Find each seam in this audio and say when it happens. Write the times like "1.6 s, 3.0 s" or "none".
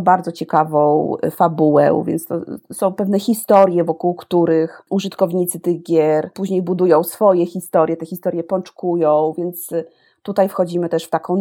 none